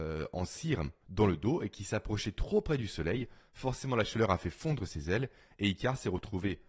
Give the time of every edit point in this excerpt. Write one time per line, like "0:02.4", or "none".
none